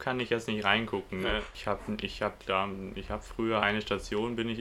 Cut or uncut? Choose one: cut